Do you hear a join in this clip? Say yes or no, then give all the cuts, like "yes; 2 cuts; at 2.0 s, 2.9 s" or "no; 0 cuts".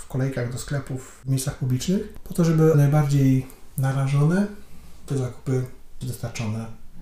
yes; 3 cuts; at 2.7 s, 5.1 s, 6.0 s